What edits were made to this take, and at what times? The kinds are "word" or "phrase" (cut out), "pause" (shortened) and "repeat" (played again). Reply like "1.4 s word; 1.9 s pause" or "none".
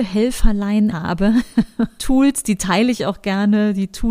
0.9 s word; 2.0 s word